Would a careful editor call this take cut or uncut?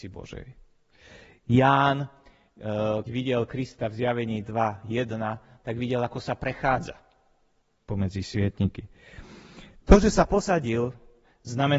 cut